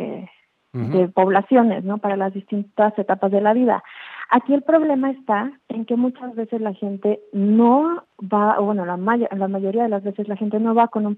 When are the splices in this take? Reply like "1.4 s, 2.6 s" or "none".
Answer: 5.6 s